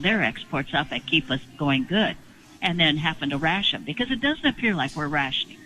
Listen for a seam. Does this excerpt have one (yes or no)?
no